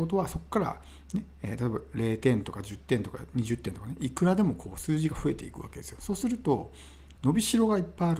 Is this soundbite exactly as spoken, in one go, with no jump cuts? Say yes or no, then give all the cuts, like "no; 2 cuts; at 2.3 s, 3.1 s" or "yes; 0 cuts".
no; 1 cut; at 7.2 s